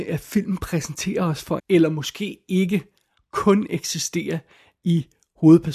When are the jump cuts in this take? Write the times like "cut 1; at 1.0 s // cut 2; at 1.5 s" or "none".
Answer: cut 1; at 1.6 s